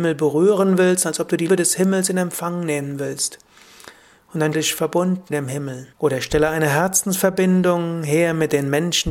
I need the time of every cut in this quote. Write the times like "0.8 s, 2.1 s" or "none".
1.5 s, 4.5 s, 5.3 s, 5.9 s